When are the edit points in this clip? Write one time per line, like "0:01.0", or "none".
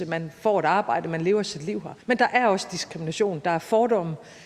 0:02.0